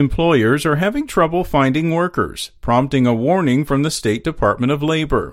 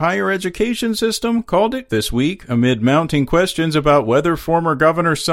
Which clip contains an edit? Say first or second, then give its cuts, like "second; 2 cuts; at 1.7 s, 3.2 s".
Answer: second; 1 cut; at 1.9 s